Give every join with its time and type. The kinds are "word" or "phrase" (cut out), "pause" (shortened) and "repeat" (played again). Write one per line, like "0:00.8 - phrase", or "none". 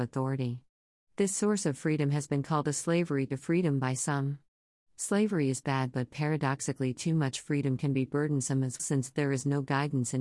0:08.8 - word